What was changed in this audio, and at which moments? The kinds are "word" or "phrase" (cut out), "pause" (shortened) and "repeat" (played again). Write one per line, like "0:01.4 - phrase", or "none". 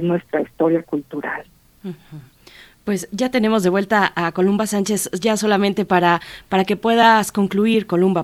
none

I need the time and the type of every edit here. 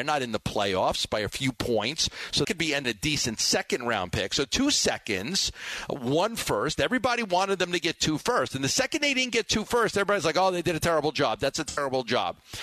0:02.4 - word
0:02.8 - phrase

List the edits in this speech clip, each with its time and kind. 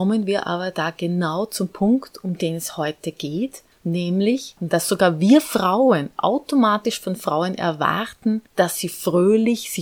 0:03.7 - pause
0:08.5 - pause

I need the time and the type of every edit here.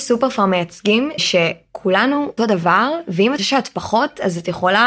0:01.2 - word
0:02.4 - word
0:03.4 - word

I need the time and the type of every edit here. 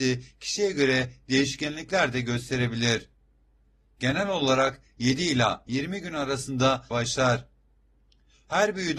0:06.9 - phrase

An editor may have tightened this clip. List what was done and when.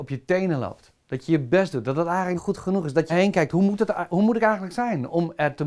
0:02.4 - word
0:03.1 - phrase

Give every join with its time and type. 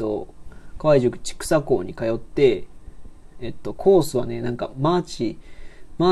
none

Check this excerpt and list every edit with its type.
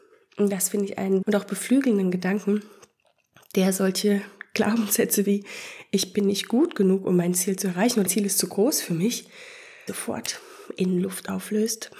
0:01.2 - word
0:08.1 - word
0:09.9 - word

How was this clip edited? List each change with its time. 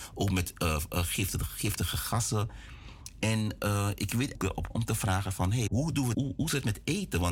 0:04.4 - phrase
0:04.7 - word
0:05.7 - word
0:06.1 - phrase

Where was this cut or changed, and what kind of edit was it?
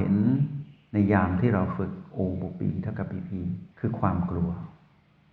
0:03.7 - pause

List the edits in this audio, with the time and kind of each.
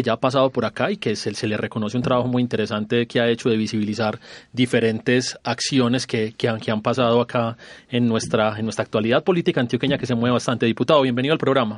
none

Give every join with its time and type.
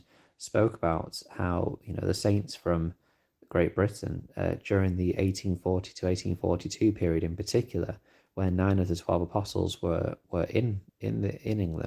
0:10.2 - pause
0:10.9 - pause

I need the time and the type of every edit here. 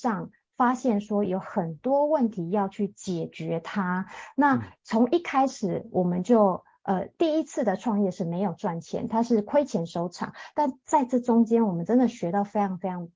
0:04.8 - pause

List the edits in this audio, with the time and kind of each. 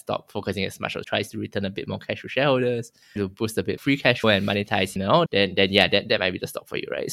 0:01.0 - word
0:03.2 - word
0:03.8 - word
0:04.2 - word
0:05.0 - word
0:05.3 - word

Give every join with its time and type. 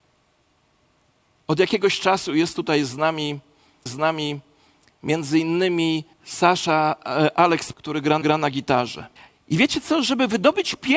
0:03.9 - repeat
0:06.1 - pause
0:07.7 - word
0:08.2 - repeat
0:09.2 - pause

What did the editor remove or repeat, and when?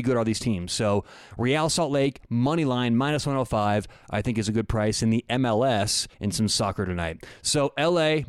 0:06.1 - pause

